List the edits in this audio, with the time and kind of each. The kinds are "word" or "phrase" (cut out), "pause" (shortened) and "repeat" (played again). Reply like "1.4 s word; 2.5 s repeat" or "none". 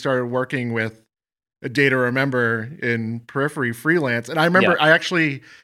none